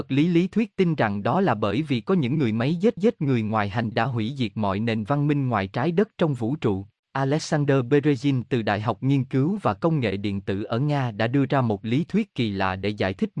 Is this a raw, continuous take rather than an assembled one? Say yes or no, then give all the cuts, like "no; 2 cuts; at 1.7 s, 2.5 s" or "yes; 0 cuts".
no; 3 cuts; at 3.0 s, 3.9 s, 7.0 s